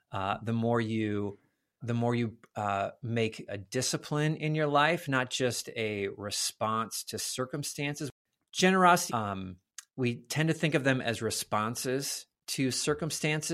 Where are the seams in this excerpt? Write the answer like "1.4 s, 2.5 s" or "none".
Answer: 1.8 s, 3.5 s, 9.1 s